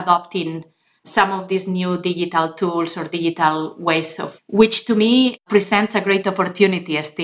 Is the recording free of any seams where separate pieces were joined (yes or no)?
no